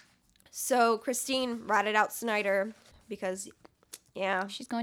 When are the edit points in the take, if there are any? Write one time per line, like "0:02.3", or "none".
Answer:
0:02.9